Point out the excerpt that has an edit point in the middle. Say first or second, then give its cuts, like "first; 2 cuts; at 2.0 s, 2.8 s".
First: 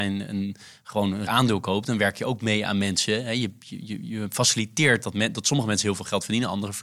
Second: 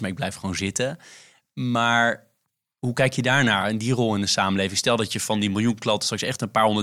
first; 1 cut; at 1.3 s